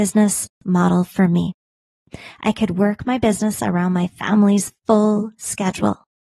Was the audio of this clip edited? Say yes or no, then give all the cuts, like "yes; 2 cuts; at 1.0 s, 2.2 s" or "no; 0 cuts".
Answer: yes; 1 cut; at 4.8 s